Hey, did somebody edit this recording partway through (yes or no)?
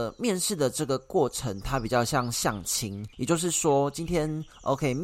yes